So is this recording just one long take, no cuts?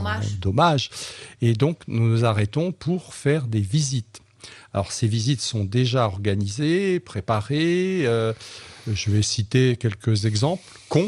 no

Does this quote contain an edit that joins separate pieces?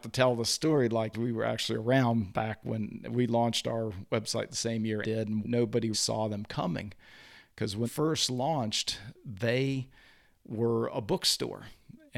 yes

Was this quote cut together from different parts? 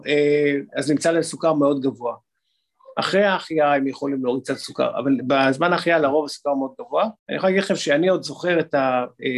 yes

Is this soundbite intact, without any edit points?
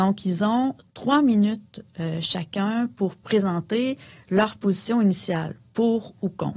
yes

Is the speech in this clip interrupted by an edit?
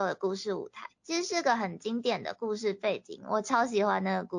yes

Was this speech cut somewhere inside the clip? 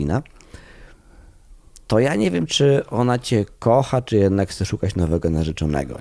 no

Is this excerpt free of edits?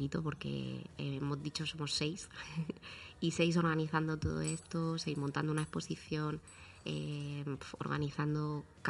yes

